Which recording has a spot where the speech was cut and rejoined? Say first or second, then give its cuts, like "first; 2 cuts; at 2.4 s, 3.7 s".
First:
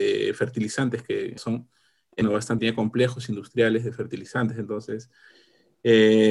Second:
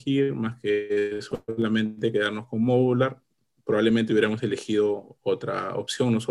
first; 3 cuts; at 1.4 s, 2.2 s, 2.6 s